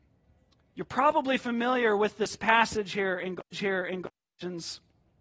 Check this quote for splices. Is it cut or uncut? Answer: cut